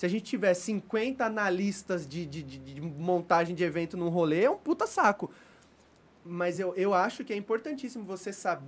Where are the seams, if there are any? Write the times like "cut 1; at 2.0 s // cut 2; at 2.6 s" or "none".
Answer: none